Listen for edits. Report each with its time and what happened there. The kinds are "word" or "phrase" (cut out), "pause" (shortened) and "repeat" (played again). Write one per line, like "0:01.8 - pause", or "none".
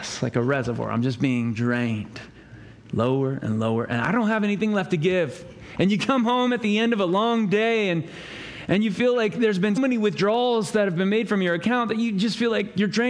0:09.8 - word